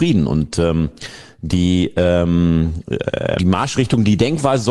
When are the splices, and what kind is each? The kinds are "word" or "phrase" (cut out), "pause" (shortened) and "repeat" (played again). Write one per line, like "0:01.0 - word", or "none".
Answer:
0:03.4 - word